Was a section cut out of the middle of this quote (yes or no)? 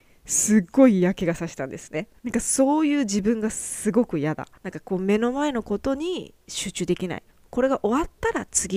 yes